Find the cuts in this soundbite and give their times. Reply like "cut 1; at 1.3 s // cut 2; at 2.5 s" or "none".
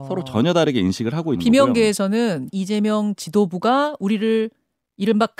cut 1; at 1.4 s // cut 2; at 2.5 s // cut 3; at 3.2 s